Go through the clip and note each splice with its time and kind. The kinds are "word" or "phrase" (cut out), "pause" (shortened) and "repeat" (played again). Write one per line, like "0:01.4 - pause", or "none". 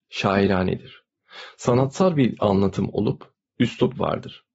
none